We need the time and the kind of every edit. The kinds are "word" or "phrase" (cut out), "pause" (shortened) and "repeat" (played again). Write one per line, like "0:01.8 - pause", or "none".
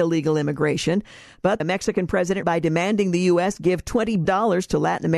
0:01.6 - word
0:02.4 - word
0:04.2 - word